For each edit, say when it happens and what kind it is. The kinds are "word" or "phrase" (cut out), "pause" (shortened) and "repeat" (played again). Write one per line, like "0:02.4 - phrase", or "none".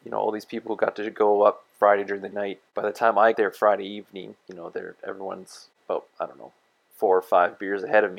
0:02.3 - phrase
0:03.3 - word
0:04.4 - pause
0:06.1 - pause

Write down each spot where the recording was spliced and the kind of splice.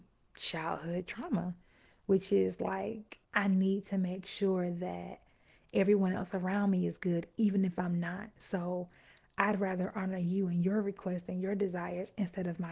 none

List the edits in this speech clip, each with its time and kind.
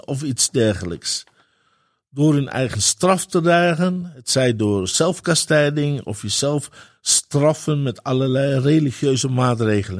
none

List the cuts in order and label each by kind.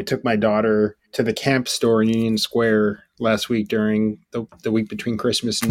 0:01.0 - pause
0:04.2 - pause

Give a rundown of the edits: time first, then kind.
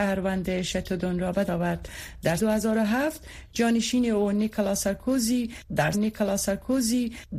0:01.5 - word
0:02.4 - word
0:05.9 - repeat

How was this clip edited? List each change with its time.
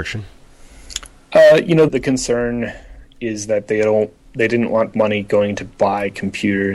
0:01.9 - word
0:04.9 - word

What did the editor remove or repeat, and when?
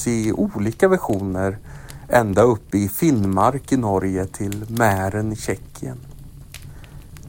none

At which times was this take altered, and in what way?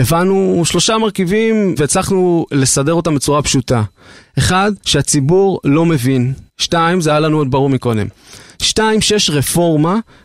0:01.8 - word
0:04.8 - pause
0:06.5 - pause

